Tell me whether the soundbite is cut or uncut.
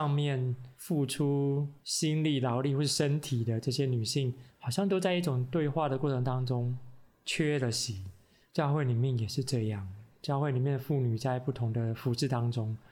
uncut